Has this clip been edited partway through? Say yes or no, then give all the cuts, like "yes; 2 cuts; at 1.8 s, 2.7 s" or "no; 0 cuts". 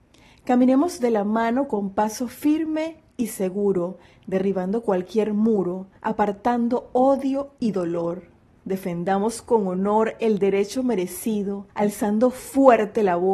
yes; 3 cuts; at 6.0 s, 8.5 s, 11.7 s